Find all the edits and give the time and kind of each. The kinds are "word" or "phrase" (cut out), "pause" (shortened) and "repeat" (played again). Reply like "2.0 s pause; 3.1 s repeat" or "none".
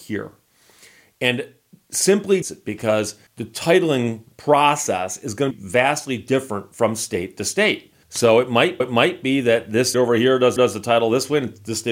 2.4 s phrase; 3.3 s pause; 4.3 s word; 5.5 s word; 8.0 s pause; 8.8 s repeat; 9.9 s word; 10.6 s repeat